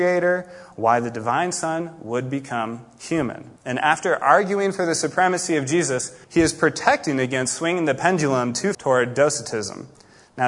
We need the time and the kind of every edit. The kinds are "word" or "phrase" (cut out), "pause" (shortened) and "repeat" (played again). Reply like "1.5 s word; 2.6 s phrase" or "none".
3.6 s pause; 6.2 s pause; 8.7 s word